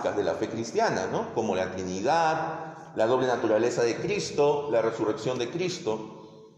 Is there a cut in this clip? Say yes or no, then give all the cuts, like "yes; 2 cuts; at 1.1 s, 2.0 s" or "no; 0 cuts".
no; 0 cuts